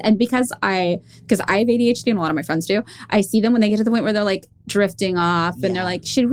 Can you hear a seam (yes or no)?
no